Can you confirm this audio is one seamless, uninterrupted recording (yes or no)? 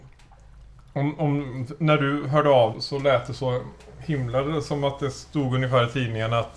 no